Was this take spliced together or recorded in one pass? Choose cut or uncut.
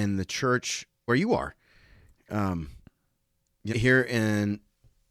cut